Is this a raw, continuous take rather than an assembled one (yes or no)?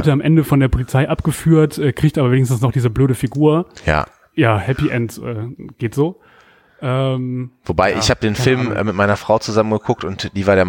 yes